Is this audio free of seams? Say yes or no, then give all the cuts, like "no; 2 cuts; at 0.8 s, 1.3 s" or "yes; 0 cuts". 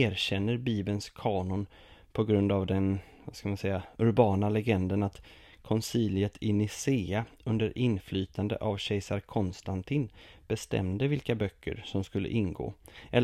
yes; 0 cuts